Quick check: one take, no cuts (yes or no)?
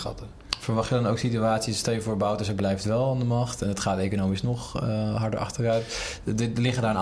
yes